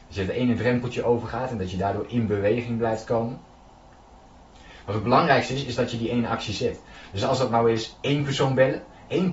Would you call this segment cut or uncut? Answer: uncut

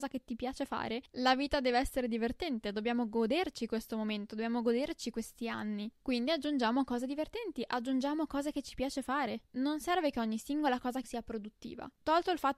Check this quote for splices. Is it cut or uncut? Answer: cut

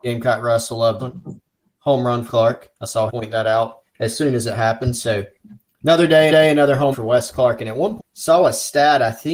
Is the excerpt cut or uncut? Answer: cut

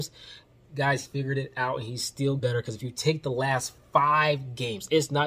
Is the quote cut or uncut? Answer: cut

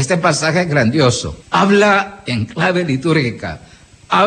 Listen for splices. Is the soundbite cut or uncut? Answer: cut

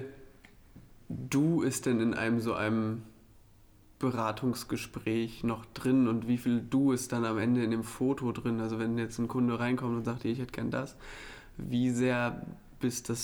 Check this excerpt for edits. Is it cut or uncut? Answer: uncut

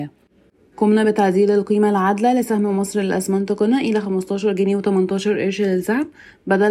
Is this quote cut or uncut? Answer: uncut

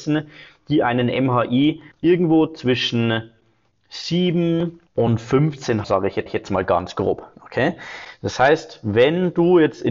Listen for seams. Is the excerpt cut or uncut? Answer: cut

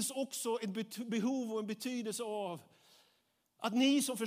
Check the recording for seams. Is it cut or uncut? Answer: uncut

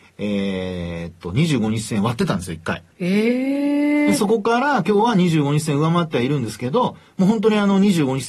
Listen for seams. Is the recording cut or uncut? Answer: cut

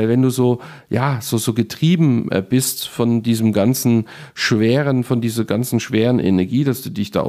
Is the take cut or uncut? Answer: uncut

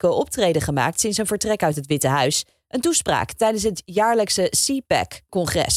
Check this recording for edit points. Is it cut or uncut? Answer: uncut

